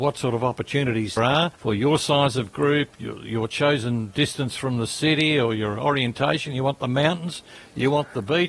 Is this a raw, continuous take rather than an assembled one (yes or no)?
no